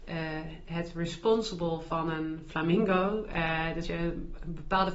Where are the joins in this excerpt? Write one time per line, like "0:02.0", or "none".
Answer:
0:03.8